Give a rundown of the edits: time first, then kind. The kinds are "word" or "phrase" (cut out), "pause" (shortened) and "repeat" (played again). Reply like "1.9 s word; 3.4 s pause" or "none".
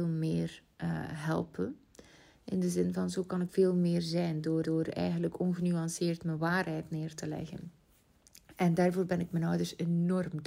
3.5 s word; 4.6 s repeat

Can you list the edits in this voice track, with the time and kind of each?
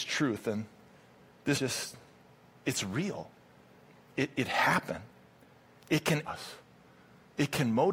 1.5 s word; 6.3 s word

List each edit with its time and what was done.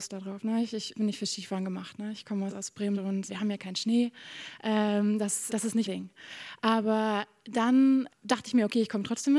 0.9 s word; 2.5 s word; 2.9 s word; 3.3 s word; 5.5 s word; 5.9 s word; 8.1 s word

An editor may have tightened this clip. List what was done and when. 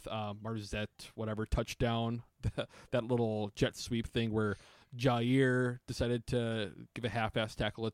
none

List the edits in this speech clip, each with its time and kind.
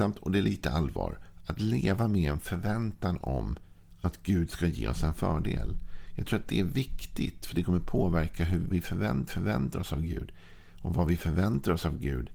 8.7 s word; 9.3 s repeat

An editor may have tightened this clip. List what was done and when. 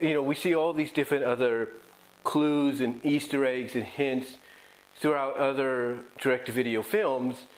none

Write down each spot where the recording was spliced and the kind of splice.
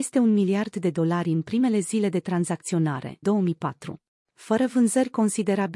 3.2 s word; 4.1 s pause

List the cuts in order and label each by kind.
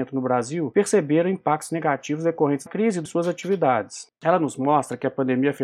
2.7 s word; 3.0 s phrase

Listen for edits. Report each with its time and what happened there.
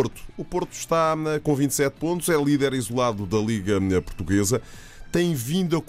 none

